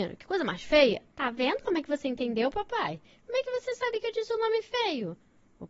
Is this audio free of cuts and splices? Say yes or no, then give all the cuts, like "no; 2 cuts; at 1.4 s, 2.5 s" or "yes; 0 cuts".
no; 1 cut; at 1.1 s